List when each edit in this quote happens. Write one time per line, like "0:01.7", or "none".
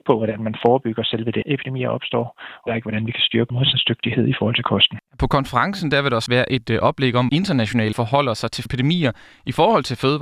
0:01.4
0:02.7
0:03.5
0:05.1
0:06.3
0:07.3
0:07.9
0:08.7